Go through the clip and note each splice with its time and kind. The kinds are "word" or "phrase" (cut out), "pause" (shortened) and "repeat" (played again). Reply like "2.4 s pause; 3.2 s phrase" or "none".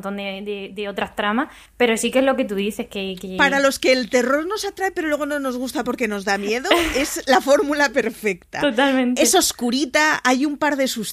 1.7 s pause

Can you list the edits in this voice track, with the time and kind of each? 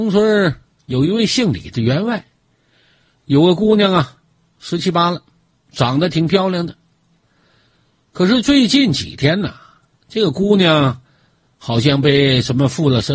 none

